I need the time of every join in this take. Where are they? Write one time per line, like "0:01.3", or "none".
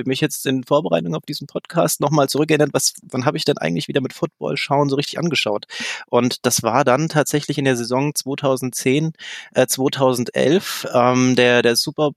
none